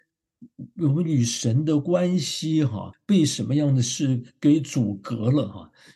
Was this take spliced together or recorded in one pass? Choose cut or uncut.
cut